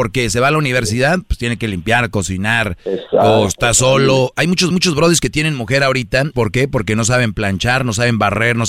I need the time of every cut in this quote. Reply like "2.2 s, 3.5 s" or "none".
4.7 s, 6.3 s

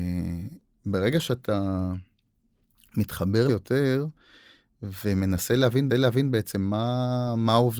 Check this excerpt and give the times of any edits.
3.5 s, 5.9 s

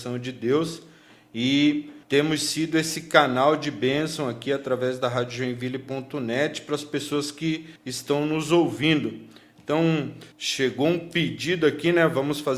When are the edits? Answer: 2.0 s, 7.8 s, 10.3 s

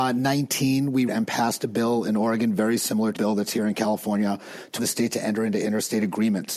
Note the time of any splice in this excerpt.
1.1 s, 3.1 s, 4.8 s

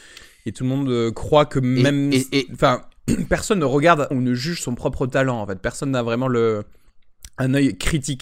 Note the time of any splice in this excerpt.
4.1 s

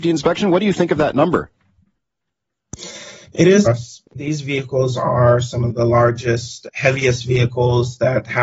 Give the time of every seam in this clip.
3.7 s, 4.1 s, 5.7 s, 6.7 s

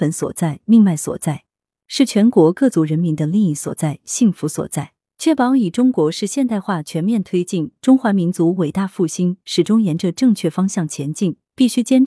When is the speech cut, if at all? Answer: none

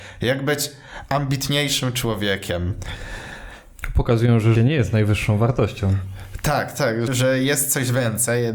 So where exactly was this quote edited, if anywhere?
4.6 s, 7.1 s

